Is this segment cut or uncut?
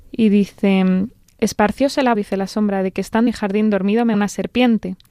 cut